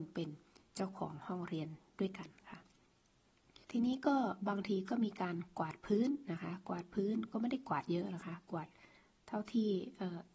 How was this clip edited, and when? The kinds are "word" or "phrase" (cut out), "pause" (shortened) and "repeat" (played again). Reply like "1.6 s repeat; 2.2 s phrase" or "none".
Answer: 3.6 s pause